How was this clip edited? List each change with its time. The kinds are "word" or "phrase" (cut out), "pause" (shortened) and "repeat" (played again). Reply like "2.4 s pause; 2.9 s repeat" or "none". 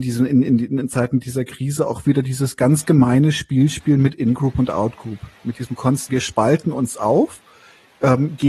6.1 s word